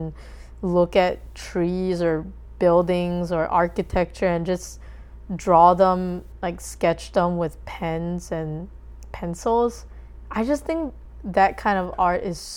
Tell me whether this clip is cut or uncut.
uncut